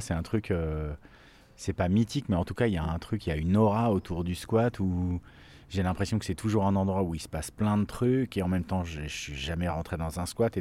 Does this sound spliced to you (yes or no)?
no